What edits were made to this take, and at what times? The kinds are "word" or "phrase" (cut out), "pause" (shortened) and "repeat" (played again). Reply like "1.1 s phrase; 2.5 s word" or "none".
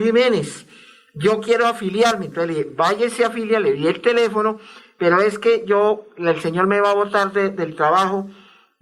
none